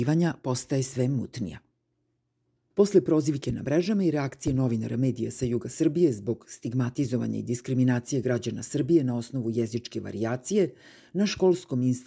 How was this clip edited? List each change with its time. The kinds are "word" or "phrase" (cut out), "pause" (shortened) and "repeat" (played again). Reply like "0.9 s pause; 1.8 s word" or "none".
none